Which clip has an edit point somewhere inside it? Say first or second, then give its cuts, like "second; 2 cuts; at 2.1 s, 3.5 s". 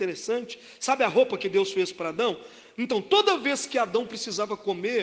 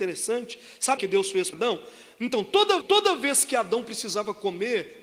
second; 3 cuts; at 1.0 s, 1.5 s, 2.8 s